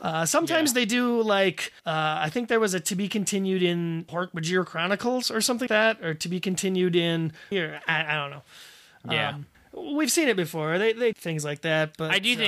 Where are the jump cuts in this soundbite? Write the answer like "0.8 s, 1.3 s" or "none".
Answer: 1.8 s, 4.1 s, 5.7 s, 7.5 s, 9.5 s, 11.1 s